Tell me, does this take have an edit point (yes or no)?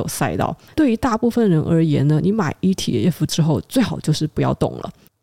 no